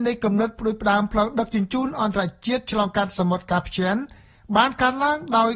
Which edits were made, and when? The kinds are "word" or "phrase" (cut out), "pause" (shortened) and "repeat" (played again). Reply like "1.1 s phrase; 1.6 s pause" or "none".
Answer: none